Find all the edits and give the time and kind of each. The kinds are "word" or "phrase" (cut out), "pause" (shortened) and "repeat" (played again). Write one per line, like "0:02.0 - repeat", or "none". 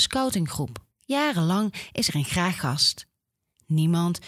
0:00.9 - pause
0:02.1 - word
0:02.6 - word